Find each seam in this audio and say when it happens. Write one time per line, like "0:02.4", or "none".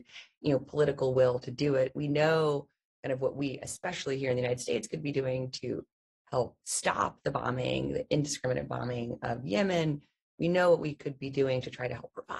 0:06.6